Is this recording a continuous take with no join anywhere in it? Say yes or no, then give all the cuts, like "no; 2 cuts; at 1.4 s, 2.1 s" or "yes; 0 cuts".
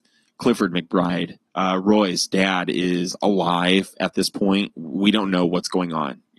no; 1 cut; at 1.5 s